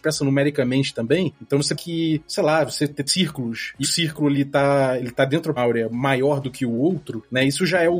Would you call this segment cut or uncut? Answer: cut